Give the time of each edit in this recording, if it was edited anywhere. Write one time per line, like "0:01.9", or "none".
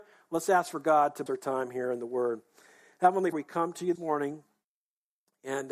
0:01.3
0:03.3
0:04.0